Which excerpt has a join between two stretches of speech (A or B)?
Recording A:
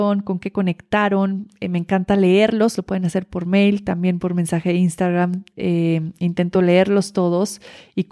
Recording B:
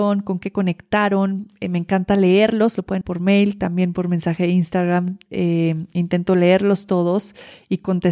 B